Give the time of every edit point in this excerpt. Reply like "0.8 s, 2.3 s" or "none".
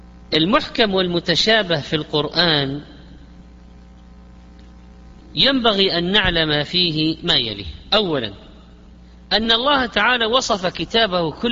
none